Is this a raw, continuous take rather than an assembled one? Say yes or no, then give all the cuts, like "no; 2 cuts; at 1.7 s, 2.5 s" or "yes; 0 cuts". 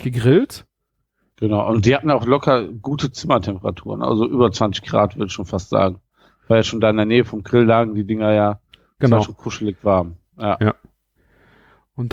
yes; 0 cuts